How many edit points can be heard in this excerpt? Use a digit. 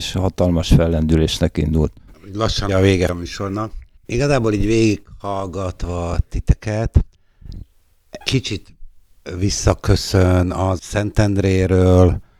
4